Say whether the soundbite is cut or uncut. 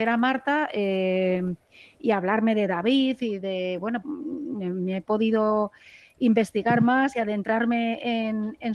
cut